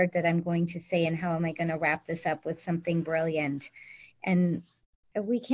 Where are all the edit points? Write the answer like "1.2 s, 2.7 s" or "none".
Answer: none